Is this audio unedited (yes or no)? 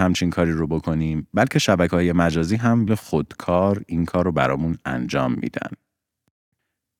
no